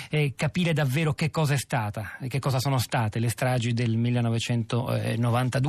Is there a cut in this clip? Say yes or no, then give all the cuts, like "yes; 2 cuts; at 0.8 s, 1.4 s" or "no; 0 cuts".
no; 0 cuts